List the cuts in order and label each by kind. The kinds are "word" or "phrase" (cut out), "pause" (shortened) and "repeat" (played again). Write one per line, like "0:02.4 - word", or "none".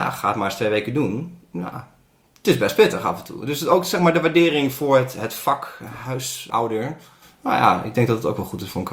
none